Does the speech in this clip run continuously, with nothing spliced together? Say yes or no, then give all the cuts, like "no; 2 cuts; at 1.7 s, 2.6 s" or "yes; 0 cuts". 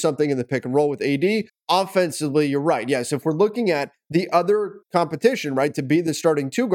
no; 2 cuts; at 1.5 s, 4.8 s